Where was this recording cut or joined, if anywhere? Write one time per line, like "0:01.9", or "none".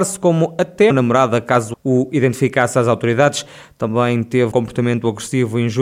0:00.9
0:01.7
0:04.5